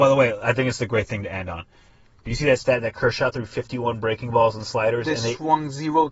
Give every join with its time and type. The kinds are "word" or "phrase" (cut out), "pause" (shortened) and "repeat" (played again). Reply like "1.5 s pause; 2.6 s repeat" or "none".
none